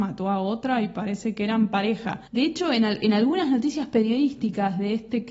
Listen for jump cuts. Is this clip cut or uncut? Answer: cut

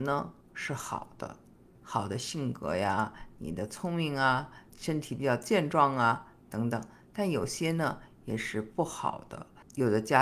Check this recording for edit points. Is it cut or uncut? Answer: uncut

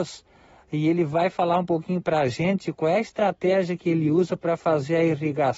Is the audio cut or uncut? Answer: uncut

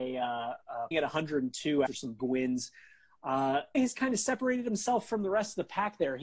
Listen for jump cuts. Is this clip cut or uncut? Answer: cut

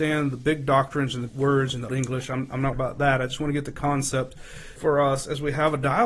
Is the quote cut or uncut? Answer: cut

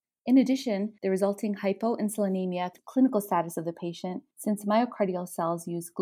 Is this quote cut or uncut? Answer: cut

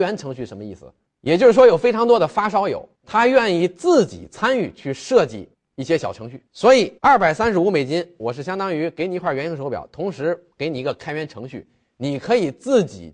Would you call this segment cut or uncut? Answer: cut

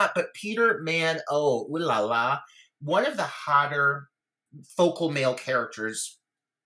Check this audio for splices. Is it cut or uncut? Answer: uncut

